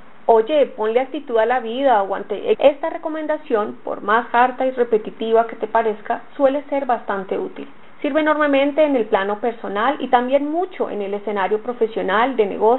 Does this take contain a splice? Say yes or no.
yes